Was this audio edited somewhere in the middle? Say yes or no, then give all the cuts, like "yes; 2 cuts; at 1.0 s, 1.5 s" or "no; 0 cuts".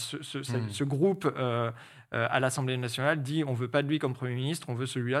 no; 0 cuts